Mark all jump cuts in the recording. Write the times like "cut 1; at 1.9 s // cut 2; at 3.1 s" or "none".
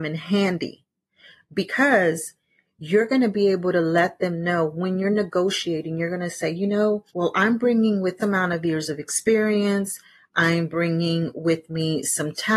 cut 1; at 7.1 s // cut 2; at 8.2 s